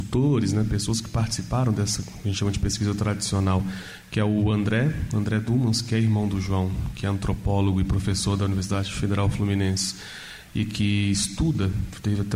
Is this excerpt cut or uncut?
uncut